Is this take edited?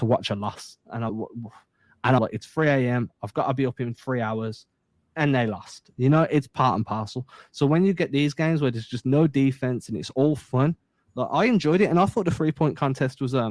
yes; 2 cuts; at 1.1 s, 2.2 s

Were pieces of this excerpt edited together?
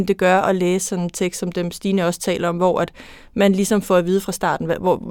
no; 0 cuts

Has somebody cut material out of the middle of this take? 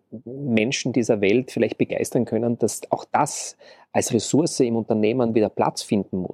no; 0 cuts

